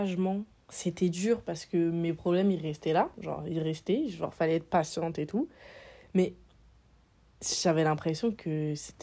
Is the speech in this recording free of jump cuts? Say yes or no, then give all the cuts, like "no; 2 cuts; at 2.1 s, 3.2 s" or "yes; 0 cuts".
yes; 0 cuts